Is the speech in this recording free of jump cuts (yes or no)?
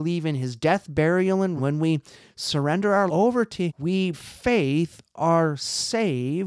no